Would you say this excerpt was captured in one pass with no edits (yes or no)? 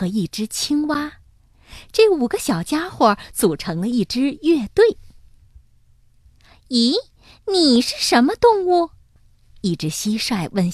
yes